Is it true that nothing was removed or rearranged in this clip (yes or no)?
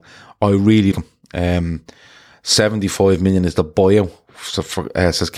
no